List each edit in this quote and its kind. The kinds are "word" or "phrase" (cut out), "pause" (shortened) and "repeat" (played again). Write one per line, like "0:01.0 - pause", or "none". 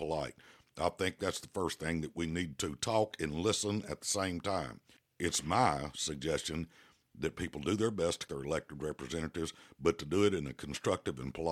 0:08.3 - word